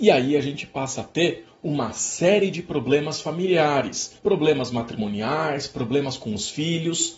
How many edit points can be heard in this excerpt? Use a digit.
1